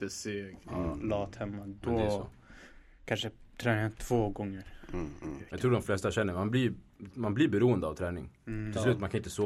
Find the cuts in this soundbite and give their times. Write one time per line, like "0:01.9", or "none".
none